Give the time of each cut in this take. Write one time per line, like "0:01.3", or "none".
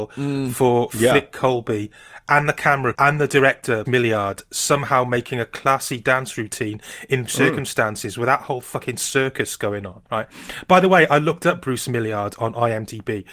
0:02.9
0:03.9
0:07.3
0:10.1